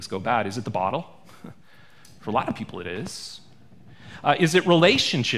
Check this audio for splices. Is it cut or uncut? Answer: uncut